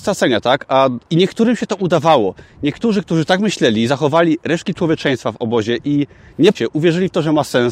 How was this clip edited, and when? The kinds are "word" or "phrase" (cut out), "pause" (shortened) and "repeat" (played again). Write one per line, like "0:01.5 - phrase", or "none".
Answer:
0:01.0 - pause
0:06.5 - word